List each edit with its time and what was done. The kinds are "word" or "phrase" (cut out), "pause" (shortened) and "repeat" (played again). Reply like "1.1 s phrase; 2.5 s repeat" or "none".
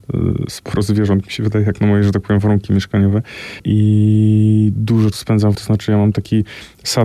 5.1 s word; 5.5 s word